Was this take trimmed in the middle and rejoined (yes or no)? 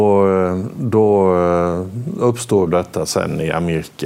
yes